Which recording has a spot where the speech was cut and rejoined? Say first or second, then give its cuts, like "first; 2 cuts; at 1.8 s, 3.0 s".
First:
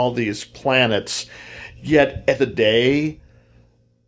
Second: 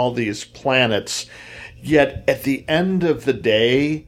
first; 1 cut; at 2.4 s